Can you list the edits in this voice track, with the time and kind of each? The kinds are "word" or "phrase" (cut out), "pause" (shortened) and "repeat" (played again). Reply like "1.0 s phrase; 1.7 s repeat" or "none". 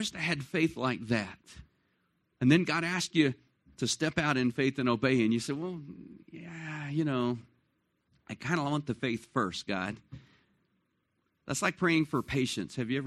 none